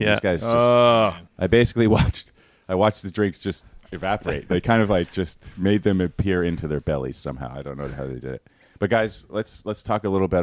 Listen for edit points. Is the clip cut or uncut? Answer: cut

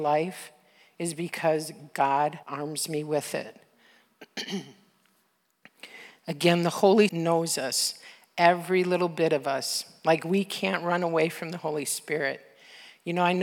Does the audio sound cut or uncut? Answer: cut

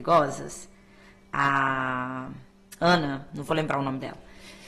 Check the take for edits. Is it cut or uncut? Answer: uncut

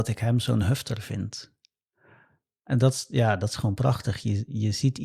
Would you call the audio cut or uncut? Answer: uncut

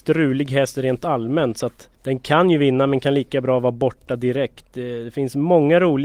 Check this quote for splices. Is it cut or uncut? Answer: cut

